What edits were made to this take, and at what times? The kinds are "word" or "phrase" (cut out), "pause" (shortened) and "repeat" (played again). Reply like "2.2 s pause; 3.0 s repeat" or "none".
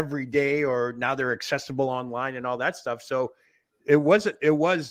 none